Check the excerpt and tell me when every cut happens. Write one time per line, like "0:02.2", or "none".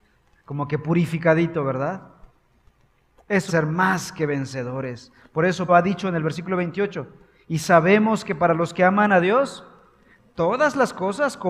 0:03.5
0:05.7